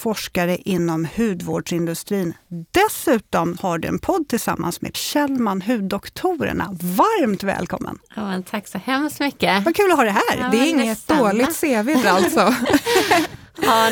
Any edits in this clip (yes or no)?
yes